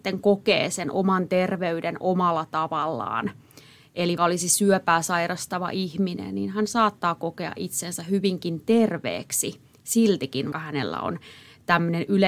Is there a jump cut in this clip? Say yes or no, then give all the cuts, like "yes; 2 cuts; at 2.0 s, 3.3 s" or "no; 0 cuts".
yes; 2 cuts; at 4.2 s, 10.5 s